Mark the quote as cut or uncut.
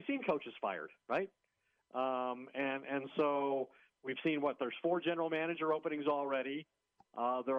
uncut